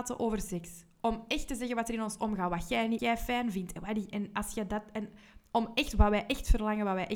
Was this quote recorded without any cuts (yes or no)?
no